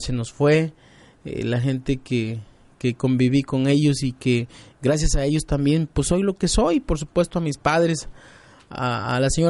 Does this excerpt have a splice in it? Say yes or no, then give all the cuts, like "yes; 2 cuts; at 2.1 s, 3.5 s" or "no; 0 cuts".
no; 0 cuts